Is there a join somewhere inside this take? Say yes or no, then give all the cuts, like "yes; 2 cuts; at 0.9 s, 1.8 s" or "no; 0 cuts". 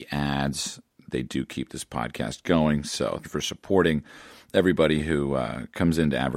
yes; 1 cut; at 3.2 s